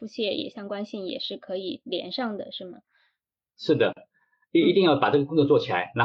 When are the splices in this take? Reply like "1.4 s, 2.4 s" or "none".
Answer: none